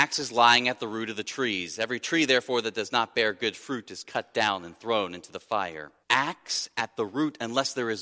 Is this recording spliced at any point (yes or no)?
yes